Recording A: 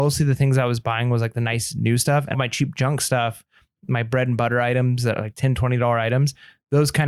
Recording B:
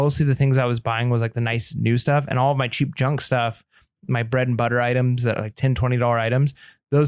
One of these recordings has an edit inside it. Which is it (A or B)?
A